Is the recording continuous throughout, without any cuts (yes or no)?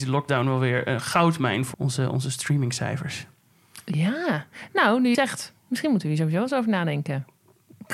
no